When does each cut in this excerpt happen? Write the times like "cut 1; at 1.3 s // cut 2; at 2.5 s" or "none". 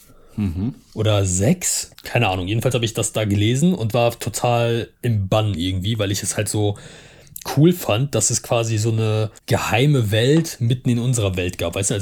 cut 1; at 1.9 s // cut 2; at 4.9 s // cut 3; at 9.4 s

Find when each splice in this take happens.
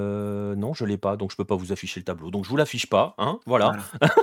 none

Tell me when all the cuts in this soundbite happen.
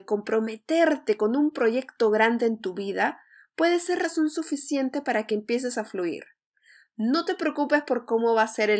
none

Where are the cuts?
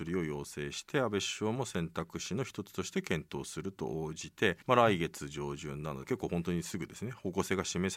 cut 1; at 4.6 s // cut 2; at 6.0 s

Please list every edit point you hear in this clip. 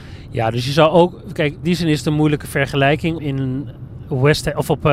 cut 1; at 1.6 s // cut 2; at 3.2 s

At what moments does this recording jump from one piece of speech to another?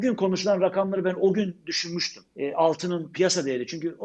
cut 1; at 2.3 s

